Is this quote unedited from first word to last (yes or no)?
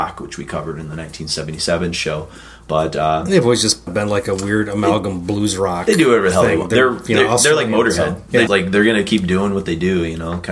no